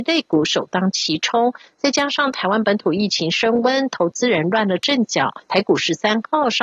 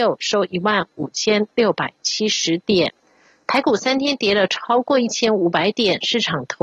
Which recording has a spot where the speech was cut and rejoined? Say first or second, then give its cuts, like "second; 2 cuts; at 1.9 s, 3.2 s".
first; 1 cut; at 5.4 s